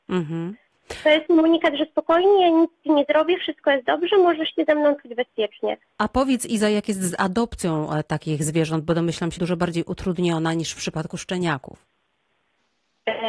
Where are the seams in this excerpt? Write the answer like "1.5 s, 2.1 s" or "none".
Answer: 1.3 s, 5.8 s, 9.4 s